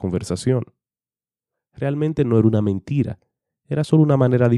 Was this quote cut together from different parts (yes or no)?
no